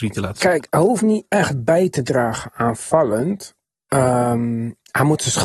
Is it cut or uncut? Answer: uncut